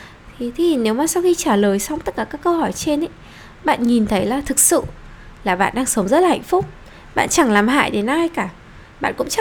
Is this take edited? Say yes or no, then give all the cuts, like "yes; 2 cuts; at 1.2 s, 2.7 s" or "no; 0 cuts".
no; 0 cuts